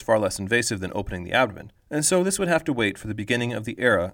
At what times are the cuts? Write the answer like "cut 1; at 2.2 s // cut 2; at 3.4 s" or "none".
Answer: cut 1; at 1.8 s